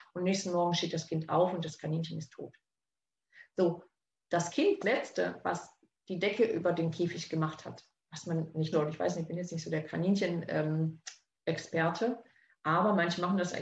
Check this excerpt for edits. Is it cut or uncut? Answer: cut